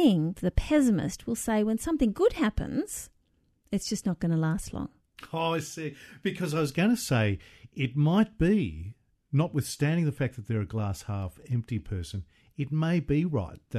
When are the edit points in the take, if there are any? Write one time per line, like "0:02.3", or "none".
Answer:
none